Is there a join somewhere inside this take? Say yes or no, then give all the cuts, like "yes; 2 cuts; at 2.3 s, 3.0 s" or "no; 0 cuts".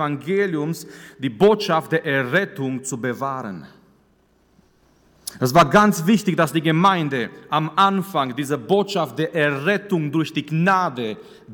no; 0 cuts